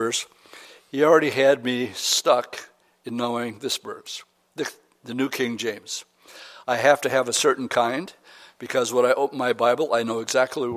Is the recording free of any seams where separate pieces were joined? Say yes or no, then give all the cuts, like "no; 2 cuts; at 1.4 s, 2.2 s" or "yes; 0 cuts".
yes; 0 cuts